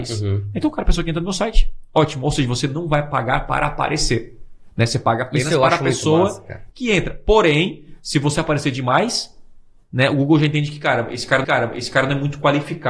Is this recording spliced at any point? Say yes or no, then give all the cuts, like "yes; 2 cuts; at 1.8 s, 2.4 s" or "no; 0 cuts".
yes; 1 cut; at 11.4 s